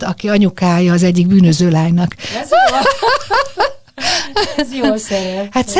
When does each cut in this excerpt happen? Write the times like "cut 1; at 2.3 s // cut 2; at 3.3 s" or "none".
none